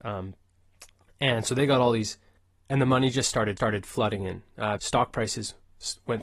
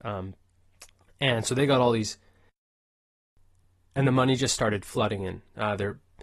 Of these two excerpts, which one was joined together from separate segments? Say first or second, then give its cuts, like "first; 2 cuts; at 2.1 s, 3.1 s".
first; 3 cuts; at 2.4 s, 3.6 s, 4.8 s